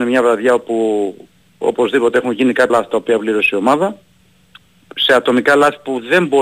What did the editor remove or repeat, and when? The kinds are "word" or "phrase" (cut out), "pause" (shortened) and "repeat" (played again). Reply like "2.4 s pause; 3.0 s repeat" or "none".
2.7 s word